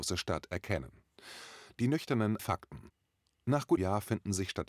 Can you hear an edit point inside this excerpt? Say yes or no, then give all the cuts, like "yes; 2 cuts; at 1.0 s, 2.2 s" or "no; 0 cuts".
yes; 2 cuts; at 2.4 s, 3.8 s